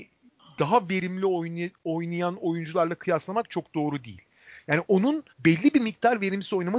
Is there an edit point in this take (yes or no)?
yes